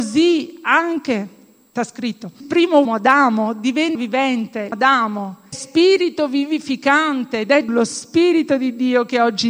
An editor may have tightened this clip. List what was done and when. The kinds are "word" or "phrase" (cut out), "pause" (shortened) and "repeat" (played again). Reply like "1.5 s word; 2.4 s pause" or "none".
1.8 s word; 2.4 s word; 2.8 s word; 3.9 s word; 4.7 s word; 5.5 s word; 7.7 s word